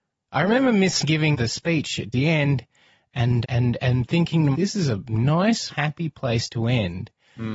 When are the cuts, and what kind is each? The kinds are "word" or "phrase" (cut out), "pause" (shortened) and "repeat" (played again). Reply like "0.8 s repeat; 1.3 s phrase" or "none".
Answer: 1.0 s word; 1.3 s word; 2.1 s word; 3.4 s word; 4.5 s word; 5.7 s word